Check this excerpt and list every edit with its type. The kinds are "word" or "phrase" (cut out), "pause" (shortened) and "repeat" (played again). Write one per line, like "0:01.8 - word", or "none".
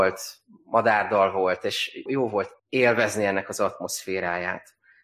0:02.1 - word
0:02.6 - pause